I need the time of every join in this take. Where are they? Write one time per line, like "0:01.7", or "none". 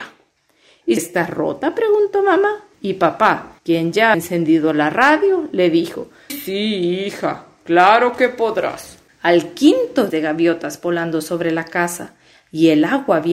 0:01.0
0:02.7
0:03.6
0:04.1
0:06.3
0:10.1

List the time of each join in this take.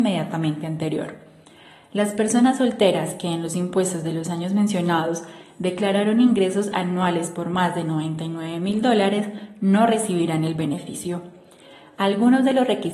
none

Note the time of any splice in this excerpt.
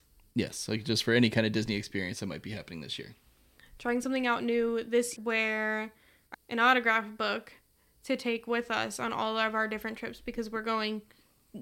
0:05.2
0:06.3

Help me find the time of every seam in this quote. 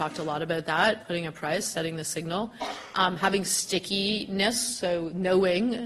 none

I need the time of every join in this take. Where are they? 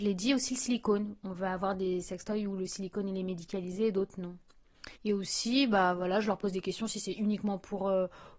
0:05.0

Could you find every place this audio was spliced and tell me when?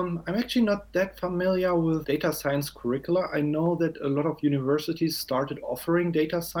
0:02.0

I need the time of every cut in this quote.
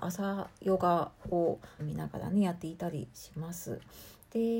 0:01.8

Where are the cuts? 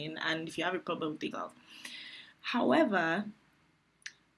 0:01.3
0:02.3

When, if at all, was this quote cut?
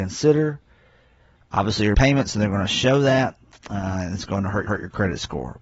0:01.9
0:04.7

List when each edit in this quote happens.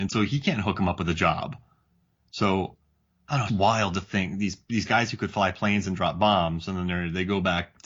0:03.5

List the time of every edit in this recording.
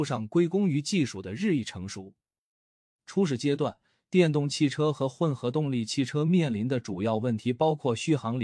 none

